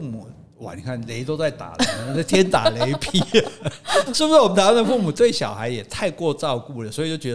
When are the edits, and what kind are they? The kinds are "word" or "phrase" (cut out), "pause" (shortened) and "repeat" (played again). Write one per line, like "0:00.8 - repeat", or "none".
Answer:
0:04.1 - word